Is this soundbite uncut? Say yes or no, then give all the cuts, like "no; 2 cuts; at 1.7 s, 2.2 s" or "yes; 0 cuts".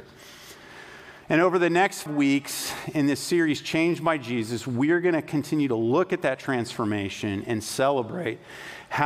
no; 1 cut; at 2.1 s